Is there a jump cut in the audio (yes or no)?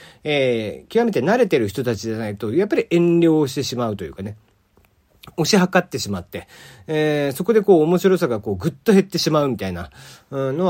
no